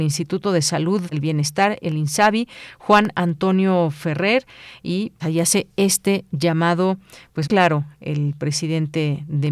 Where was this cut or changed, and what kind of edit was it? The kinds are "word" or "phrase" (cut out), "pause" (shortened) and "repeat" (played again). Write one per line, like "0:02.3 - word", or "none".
0:01.1 - word
0:05.2 - word
0:07.4 - word